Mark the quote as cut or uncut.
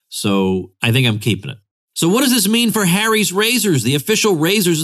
uncut